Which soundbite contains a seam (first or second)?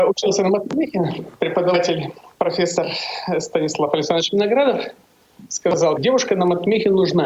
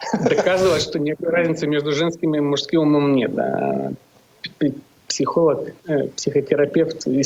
first